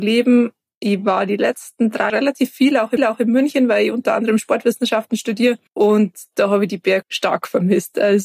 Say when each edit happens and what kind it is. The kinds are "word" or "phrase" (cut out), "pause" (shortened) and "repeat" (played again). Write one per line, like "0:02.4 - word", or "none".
0:02.1 - word
0:03.0 - repeat
0:05.7 - pause
0:07.0 - word